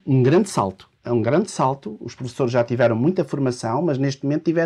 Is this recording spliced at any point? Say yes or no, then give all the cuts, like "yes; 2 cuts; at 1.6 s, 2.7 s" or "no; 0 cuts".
yes; 1 cut; at 1.0 s